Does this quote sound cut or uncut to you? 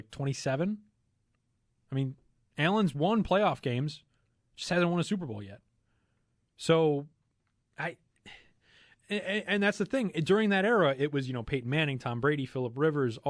uncut